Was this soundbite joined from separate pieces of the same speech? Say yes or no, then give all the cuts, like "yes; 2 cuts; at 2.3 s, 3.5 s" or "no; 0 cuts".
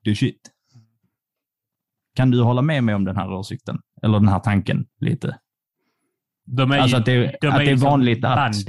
no; 0 cuts